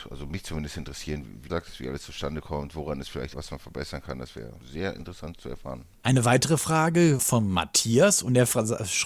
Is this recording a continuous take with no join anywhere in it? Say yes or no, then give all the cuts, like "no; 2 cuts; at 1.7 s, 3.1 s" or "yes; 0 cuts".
no; 5 cuts; at 1.5 s, 3.3 s, 4.6 s, 5.9 s, 7.2 s